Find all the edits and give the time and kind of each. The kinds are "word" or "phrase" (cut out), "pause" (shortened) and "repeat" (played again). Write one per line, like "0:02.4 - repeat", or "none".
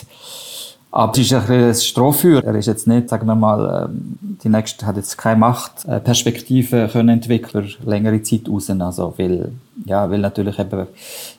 0:01.1 - word
0:02.4 - word